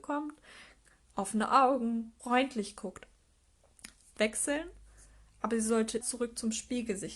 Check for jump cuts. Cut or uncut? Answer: cut